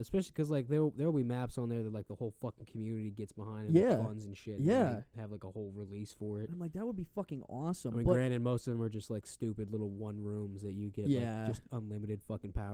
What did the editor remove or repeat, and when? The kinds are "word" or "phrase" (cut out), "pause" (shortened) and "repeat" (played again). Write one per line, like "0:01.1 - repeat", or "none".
none